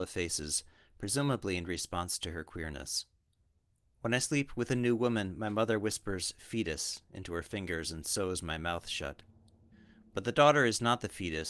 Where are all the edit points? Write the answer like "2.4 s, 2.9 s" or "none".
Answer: none